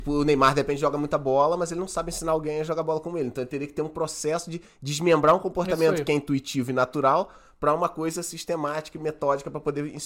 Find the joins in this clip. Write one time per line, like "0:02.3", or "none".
none